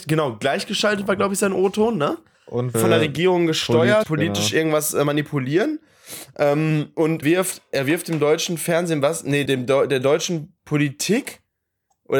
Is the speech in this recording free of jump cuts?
no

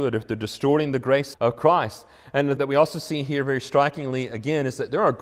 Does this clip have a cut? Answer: yes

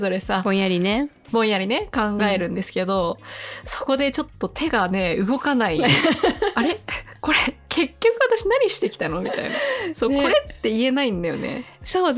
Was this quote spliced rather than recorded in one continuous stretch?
no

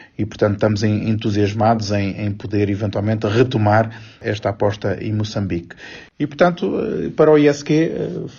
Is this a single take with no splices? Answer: yes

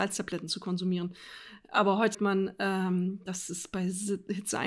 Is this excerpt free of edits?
no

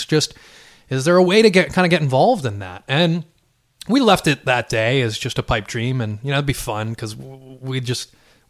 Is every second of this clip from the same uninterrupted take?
yes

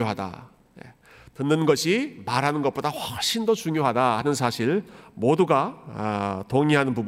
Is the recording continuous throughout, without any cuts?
yes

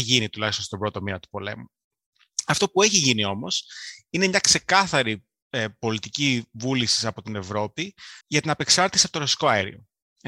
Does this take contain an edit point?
yes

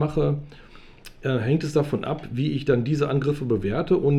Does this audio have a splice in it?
no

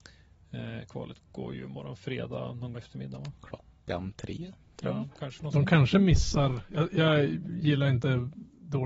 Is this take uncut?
no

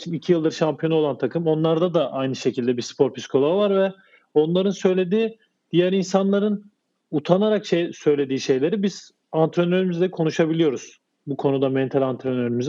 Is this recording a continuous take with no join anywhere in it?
yes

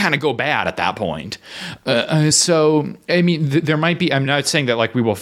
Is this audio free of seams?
yes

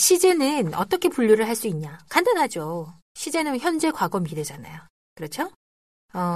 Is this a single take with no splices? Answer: yes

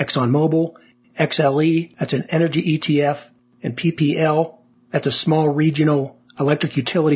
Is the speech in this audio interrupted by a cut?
no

